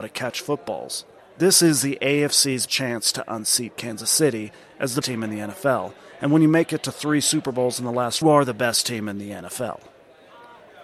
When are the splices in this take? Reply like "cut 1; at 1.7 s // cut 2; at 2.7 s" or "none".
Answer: cut 1; at 1.2 s // cut 2; at 2.7 s // cut 3; at 5.0 s // cut 4; at 8.2 s